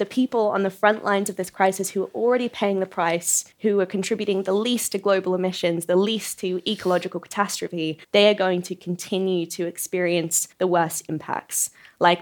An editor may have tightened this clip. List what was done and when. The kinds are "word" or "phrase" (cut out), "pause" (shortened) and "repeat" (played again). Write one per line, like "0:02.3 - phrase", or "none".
0:03.5 - pause
0:08.0 - pause
0:10.5 - pause